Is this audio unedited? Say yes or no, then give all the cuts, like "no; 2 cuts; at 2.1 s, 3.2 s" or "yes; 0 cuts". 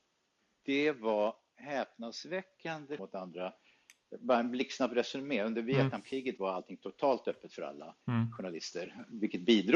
no; 2 cuts; at 3.0 s, 8.0 s